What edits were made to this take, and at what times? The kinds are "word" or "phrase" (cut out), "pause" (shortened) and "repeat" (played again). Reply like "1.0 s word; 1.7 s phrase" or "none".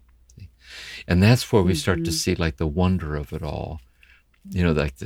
none